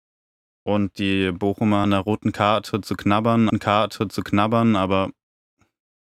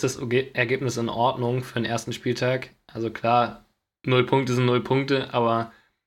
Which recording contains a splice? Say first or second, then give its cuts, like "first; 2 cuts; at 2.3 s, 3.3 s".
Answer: first; 2 cuts; at 1.8 s, 3.5 s